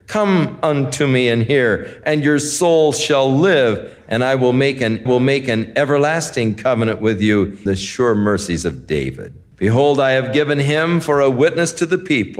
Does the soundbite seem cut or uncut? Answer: cut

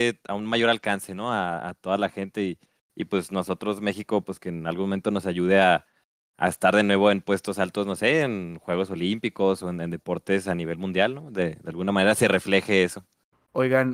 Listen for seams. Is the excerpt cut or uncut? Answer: uncut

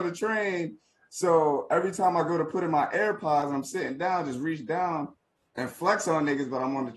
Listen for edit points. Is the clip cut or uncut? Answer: uncut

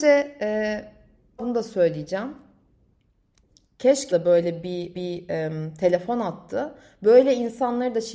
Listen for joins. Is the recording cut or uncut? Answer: cut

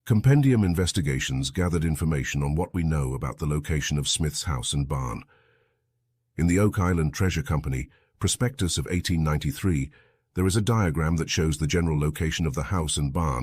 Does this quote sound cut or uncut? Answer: uncut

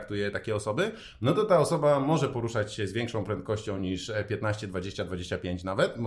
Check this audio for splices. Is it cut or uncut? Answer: uncut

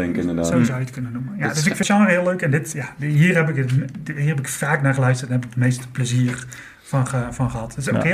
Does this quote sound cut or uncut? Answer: cut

